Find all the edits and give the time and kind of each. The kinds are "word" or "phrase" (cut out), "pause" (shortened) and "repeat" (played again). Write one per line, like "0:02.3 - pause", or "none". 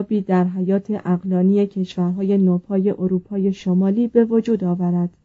none